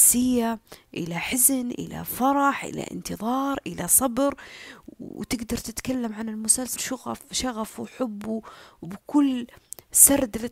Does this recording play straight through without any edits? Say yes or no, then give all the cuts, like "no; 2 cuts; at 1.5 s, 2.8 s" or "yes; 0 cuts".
no; 1 cut; at 6.8 s